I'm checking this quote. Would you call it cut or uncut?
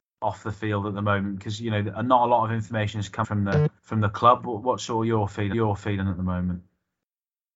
cut